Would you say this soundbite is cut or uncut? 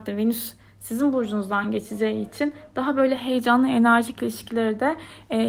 uncut